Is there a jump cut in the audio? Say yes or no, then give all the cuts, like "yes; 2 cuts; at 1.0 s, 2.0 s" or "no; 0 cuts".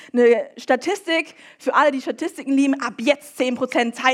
no; 0 cuts